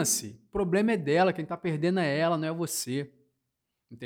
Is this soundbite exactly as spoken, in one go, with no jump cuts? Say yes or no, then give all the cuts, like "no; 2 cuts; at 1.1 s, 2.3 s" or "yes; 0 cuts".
yes; 0 cuts